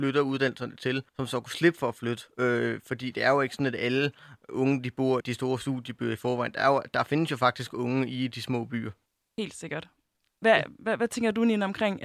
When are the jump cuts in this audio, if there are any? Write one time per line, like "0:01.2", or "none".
0:01.1
0:05.2
0:09.1